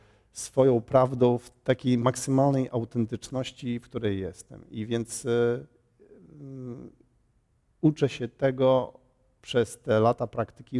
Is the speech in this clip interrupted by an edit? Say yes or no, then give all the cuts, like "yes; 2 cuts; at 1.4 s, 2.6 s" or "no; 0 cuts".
no; 0 cuts